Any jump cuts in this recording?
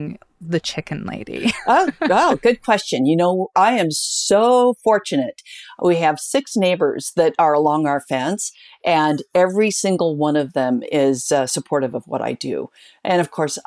no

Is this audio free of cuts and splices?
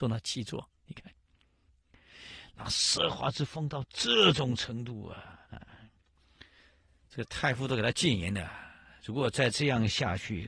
no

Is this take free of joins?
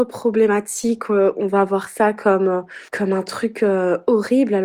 no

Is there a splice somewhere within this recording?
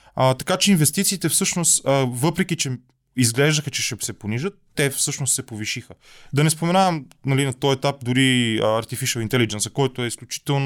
no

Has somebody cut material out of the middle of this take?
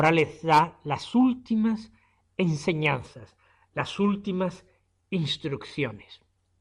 no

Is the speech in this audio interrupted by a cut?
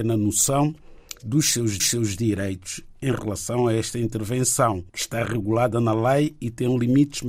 yes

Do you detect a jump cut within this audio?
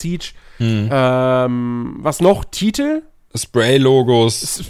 no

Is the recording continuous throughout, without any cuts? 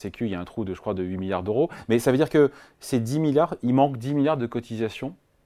yes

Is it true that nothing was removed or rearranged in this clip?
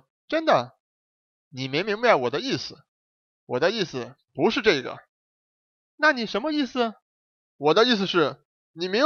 yes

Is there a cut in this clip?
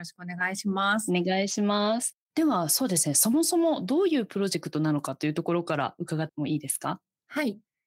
yes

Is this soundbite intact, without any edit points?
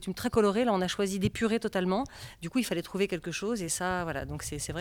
yes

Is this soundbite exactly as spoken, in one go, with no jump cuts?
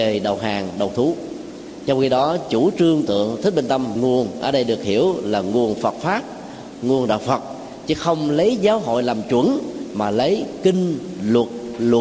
no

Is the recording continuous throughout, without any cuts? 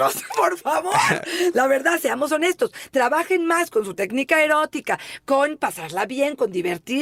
yes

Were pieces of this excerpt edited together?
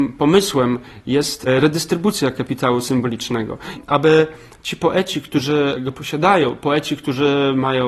no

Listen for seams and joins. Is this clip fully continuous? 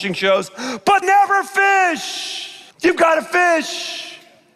no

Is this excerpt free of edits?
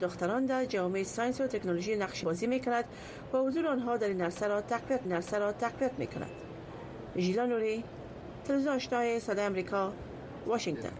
no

